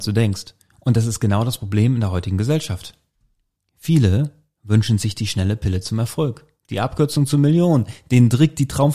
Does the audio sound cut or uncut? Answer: uncut